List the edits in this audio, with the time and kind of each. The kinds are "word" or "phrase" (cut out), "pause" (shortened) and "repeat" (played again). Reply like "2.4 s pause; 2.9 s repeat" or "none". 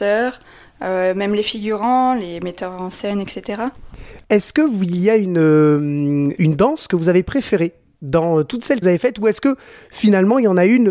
8.8 s word